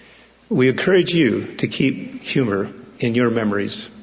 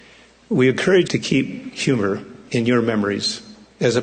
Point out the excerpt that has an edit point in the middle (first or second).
second